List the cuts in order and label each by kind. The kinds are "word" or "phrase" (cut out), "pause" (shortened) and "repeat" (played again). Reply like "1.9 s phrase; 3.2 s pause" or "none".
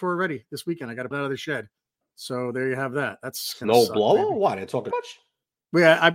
1.1 s word; 4.9 s word